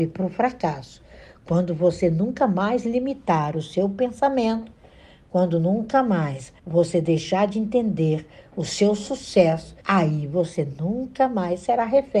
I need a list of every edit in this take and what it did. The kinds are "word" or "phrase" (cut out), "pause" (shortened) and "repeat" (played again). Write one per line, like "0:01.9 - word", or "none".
0:06.6 - pause
0:09.8 - pause